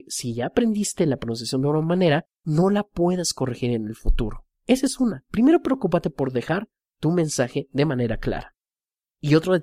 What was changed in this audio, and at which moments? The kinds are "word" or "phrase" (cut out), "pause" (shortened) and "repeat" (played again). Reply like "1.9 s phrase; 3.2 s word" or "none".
2.3 s pause; 4.5 s pause